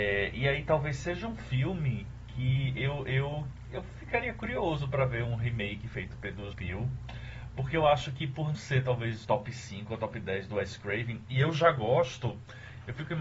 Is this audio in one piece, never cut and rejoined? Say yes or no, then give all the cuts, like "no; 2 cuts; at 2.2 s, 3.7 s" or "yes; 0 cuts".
no; 4 cuts; at 3.7 s, 6.5 s, 8.5 s, 9.2 s